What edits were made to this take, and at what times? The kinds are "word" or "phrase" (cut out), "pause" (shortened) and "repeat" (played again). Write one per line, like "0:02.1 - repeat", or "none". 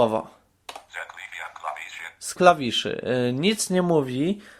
0:02.4 - word